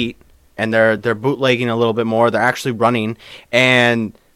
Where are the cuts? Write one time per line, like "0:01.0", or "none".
none